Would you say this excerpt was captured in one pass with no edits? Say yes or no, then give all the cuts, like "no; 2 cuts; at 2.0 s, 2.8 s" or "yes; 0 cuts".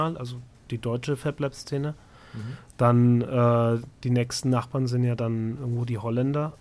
yes; 0 cuts